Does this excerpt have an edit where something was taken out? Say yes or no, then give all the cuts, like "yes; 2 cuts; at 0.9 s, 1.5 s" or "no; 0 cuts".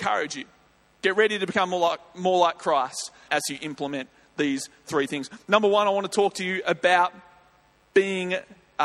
yes; 1 cut; at 3.3 s